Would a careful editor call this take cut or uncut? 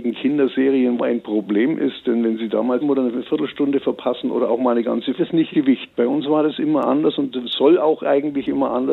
cut